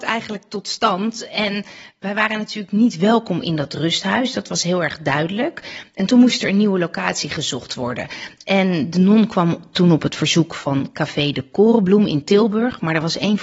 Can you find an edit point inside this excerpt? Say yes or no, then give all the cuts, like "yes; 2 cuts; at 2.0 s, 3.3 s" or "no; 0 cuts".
no; 0 cuts